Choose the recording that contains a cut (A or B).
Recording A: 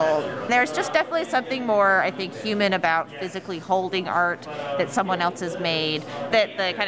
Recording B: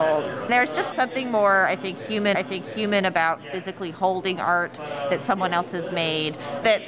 B